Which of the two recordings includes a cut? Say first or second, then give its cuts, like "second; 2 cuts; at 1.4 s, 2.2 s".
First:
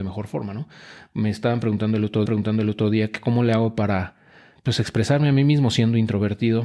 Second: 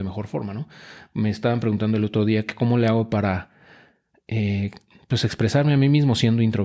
first; 2 cuts; at 2.3 s, 4.6 s